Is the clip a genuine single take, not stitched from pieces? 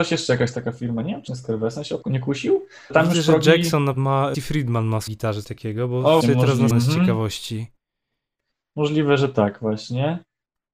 no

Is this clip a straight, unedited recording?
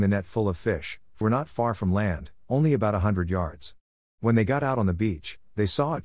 no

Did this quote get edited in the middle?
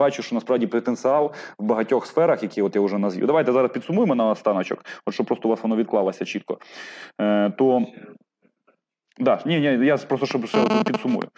no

